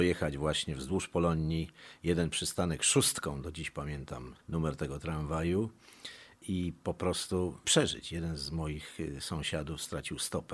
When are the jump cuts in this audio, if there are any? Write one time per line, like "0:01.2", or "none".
0:04.4